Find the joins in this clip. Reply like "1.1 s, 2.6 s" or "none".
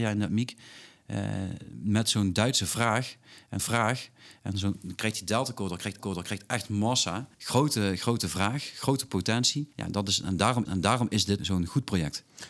3.6 s, 6.0 s, 7.3 s, 9.7 s, 10.6 s, 11.4 s